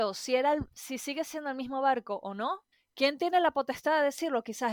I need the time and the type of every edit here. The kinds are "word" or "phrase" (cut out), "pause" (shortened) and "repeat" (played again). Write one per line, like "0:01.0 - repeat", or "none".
0:02.7 - pause